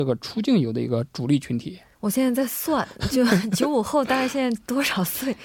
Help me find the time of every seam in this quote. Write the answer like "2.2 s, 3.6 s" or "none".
1.9 s